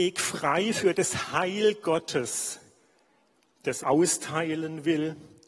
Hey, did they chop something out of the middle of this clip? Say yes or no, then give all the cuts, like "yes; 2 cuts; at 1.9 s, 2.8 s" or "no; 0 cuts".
yes; 1 cut; at 3.8 s